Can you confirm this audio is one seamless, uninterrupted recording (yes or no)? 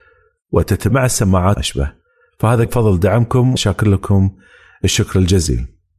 no